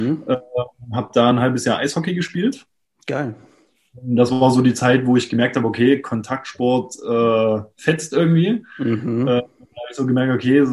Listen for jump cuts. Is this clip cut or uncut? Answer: uncut